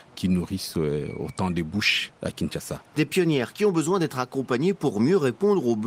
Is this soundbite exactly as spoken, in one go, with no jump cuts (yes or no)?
yes